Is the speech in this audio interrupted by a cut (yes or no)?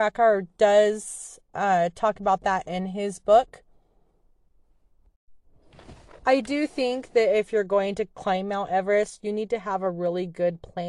no